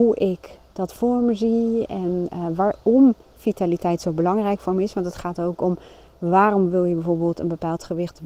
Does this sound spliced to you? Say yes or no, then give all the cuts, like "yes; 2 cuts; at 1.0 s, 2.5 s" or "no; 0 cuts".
no; 0 cuts